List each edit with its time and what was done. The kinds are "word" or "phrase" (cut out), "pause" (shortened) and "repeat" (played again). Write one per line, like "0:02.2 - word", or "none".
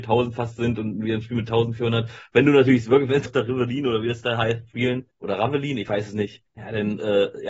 0:03.3 - word
0:05.1 - pause
0:06.5 - pause